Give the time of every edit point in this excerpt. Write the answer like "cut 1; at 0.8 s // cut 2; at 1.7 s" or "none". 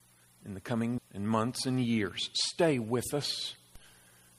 cut 1; at 1.0 s